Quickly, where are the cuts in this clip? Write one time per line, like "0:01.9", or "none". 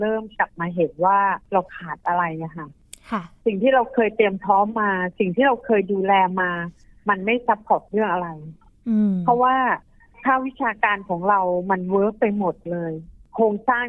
none